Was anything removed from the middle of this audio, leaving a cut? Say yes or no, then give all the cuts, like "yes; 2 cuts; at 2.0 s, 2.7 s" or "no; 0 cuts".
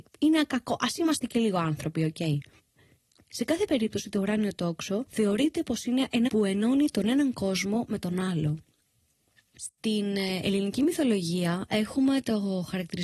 yes; 1 cut; at 6.3 s